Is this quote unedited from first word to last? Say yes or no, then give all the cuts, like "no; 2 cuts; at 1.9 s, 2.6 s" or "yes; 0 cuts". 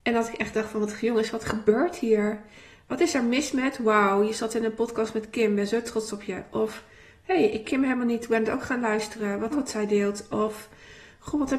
no; 2 cuts; at 7.6 s, 9.5 s